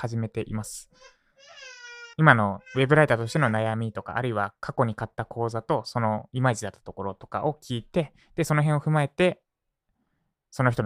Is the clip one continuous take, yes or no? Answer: no